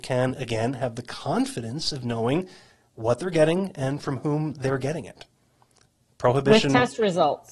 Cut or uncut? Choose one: uncut